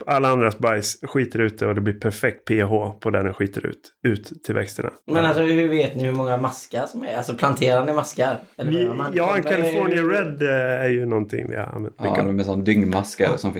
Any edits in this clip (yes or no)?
yes